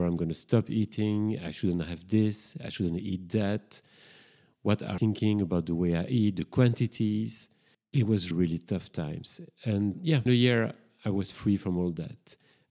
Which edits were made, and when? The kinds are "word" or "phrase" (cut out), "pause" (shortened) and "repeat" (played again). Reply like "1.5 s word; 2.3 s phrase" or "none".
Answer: 5.0 s word; 8.3 s word; 9.9 s word; 10.3 s word